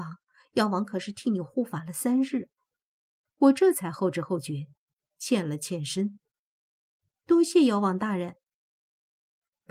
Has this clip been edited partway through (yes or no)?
no